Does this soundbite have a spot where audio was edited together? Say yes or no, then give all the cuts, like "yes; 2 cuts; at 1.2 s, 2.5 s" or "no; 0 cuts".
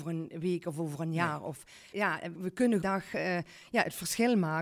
yes; 3 cuts; at 1.9 s, 2.3 s, 2.8 s